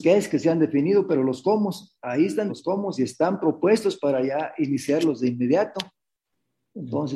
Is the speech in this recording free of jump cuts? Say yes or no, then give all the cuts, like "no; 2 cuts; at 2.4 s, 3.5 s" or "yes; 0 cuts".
no; 1 cut; at 2.5 s